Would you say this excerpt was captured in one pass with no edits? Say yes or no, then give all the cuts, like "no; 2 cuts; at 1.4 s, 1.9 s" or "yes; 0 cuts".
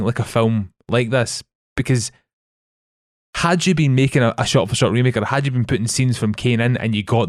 yes; 0 cuts